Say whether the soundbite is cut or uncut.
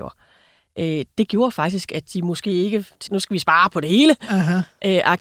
cut